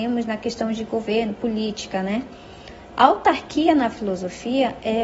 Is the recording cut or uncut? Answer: uncut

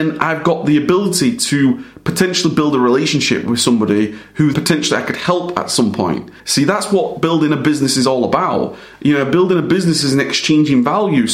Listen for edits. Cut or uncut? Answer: cut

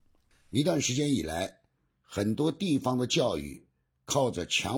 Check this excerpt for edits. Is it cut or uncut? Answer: uncut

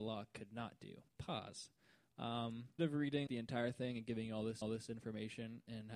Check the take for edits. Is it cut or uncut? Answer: cut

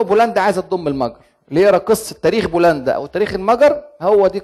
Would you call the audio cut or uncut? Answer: uncut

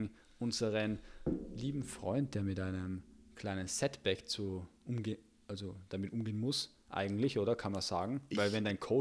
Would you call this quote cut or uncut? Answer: uncut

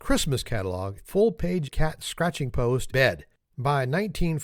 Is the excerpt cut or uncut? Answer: cut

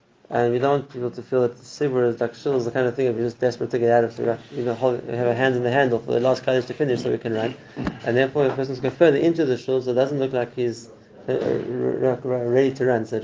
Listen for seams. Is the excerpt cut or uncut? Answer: uncut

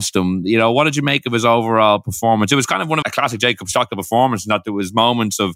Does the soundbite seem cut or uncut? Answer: cut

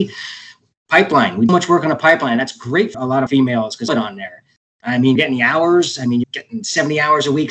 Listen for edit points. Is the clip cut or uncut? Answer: cut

